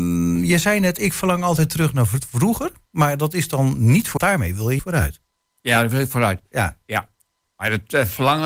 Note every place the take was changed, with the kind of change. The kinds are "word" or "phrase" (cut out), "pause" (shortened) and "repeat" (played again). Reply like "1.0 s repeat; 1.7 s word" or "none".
4.2 s phrase; 4.8 s word